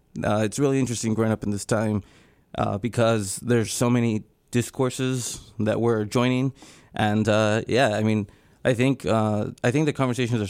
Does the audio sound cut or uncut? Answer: uncut